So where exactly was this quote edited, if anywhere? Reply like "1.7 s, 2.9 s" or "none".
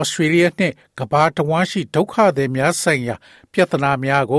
none